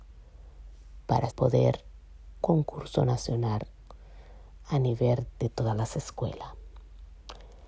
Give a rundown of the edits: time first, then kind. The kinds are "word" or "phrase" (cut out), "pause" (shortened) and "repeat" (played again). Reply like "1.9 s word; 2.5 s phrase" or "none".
1.3 s word; 2.4 s phrase; 5.3 s word